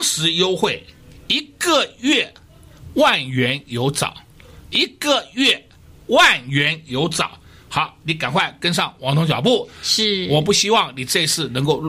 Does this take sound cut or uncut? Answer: uncut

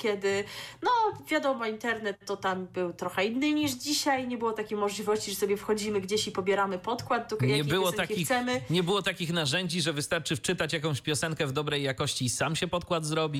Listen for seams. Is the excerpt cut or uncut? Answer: uncut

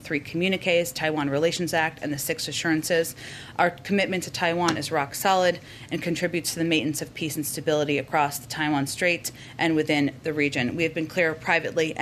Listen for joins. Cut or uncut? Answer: uncut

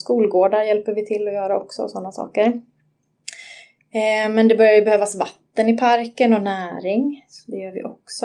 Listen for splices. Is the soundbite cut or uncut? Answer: uncut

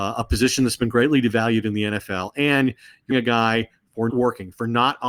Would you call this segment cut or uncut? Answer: cut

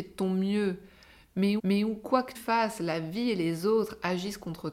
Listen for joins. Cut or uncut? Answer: cut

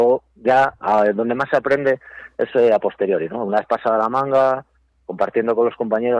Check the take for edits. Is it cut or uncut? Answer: uncut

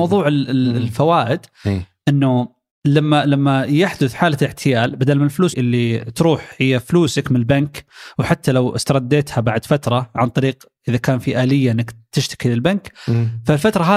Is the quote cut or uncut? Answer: cut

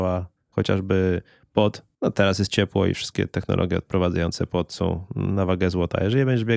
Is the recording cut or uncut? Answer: cut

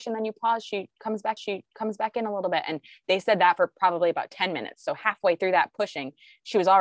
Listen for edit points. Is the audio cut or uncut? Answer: cut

